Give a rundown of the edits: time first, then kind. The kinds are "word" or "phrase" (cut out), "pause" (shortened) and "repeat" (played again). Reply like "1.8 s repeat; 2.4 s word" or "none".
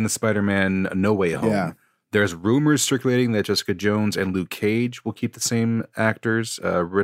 none